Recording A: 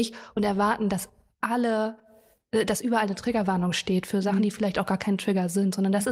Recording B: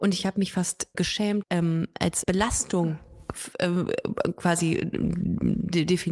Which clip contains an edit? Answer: B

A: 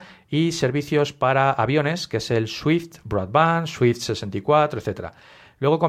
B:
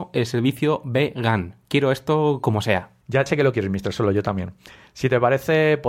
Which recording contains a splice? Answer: B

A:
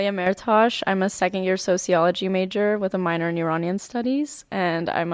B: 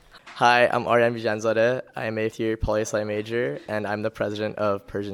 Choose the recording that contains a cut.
B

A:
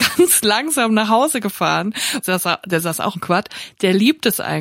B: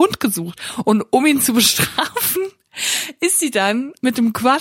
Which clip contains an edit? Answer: A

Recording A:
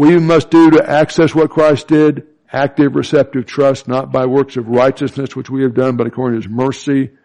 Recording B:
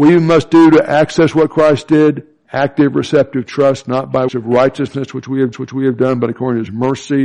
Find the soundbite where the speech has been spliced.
B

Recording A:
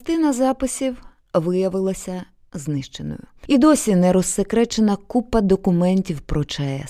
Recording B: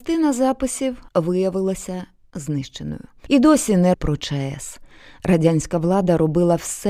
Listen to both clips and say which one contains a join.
B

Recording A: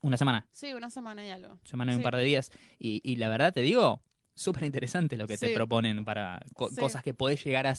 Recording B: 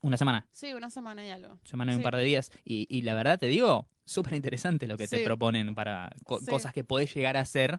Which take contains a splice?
B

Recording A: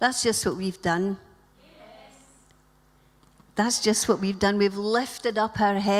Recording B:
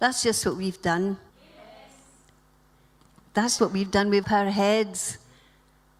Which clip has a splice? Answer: B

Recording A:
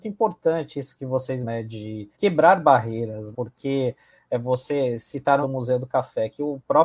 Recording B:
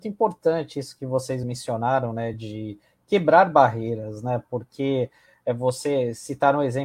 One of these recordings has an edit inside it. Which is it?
A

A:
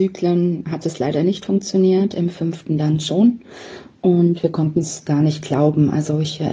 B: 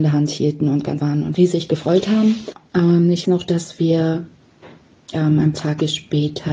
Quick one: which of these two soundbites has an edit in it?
B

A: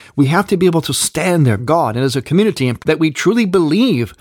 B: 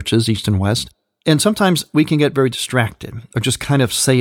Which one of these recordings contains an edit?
A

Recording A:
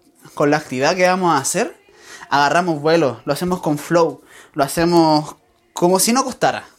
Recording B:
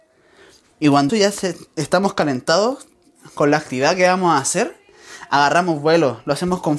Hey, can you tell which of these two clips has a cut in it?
B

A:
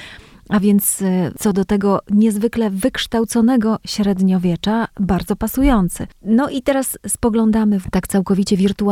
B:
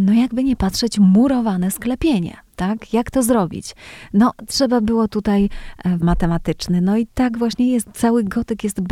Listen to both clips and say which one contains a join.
B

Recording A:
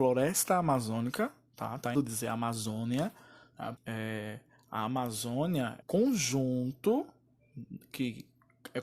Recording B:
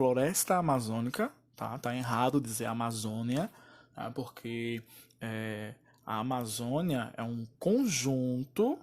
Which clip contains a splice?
A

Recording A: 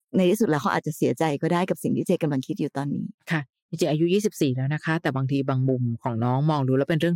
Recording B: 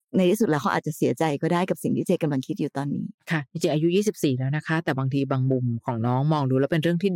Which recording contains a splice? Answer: B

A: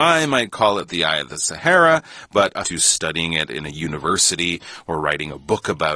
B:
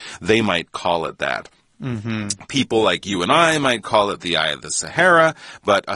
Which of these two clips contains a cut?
A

